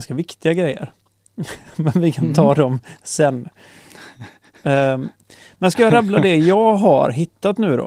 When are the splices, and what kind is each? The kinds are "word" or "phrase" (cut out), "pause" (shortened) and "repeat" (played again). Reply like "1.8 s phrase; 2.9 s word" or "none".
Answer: none